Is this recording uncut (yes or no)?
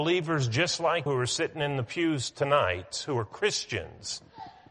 no